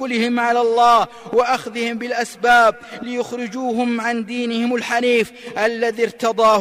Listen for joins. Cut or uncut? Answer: uncut